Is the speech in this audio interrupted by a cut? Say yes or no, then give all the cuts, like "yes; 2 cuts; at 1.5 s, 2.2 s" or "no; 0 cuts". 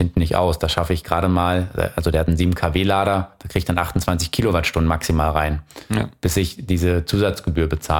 no; 0 cuts